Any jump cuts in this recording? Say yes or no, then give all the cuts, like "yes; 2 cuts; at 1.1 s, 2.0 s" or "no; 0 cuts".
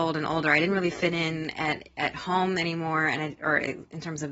no; 0 cuts